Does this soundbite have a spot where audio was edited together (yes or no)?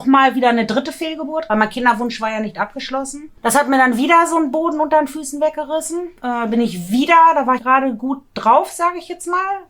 yes